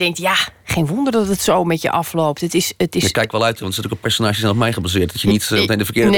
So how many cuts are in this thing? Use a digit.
1